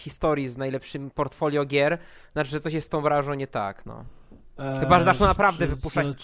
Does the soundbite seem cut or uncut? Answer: uncut